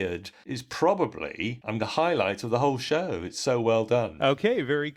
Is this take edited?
yes; 1 cut; at 1.8 s

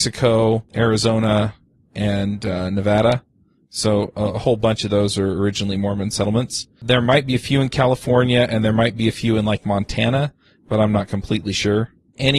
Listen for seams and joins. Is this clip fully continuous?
yes; 0 cuts

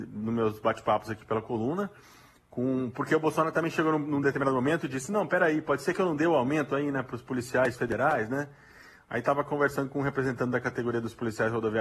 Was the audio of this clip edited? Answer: no; 0 cuts

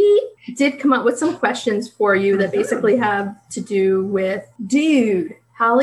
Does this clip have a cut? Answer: no; 0 cuts

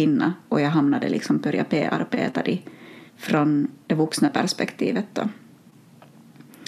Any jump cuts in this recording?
yes; 1 cut; at 3.1 s

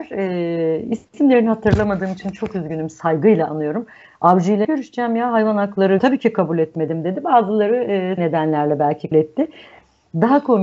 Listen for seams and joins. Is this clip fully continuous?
no; 4 cuts; at 4.6 s, 6.0 s, 8.2 s, 9.1 s

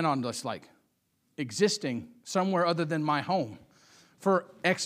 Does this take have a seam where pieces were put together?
no; 0 cuts

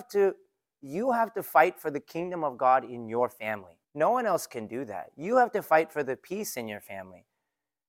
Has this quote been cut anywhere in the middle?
yes; 1 cut; at 3.8 s

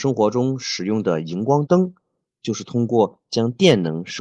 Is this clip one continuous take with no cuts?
yes; 0 cuts

